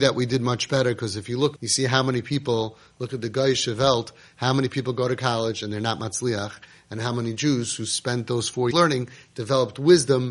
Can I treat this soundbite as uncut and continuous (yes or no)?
no